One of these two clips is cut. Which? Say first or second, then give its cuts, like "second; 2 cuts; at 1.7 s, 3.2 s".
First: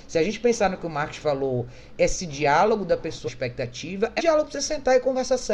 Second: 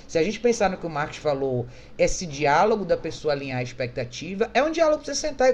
first; 2 cuts; at 3.3 s, 4.2 s